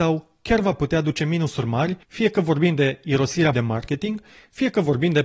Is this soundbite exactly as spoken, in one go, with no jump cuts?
no; 2 cuts; at 2.0 s, 3.5 s

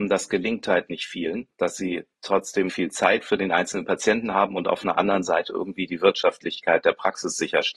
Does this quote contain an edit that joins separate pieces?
yes; 1 cut; at 2.7 s

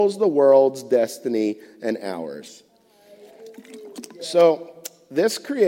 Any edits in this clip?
no; 0 cuts

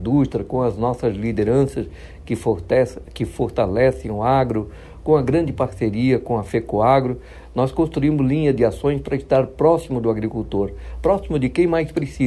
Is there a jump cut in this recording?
no; 0 cuts

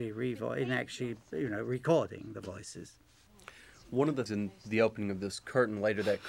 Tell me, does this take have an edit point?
yes; 1 cut; at 4.3 s

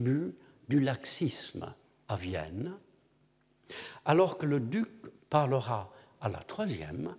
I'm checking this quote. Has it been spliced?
no; 0 cuts

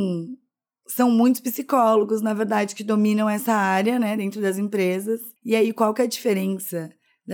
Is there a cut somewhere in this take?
yes; 1 cut; at 5.4 s

